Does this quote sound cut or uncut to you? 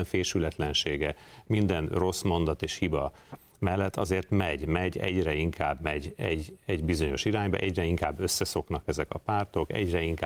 uncut